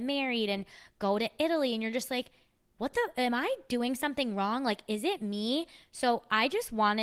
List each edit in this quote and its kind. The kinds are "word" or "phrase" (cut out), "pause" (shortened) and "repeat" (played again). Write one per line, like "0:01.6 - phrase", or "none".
none